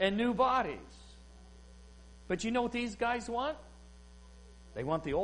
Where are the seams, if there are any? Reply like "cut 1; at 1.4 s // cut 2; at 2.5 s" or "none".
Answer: none